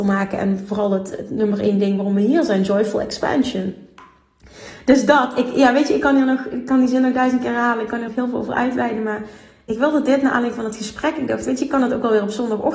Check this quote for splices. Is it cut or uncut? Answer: cut